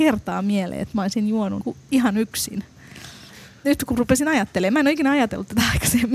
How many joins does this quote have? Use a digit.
1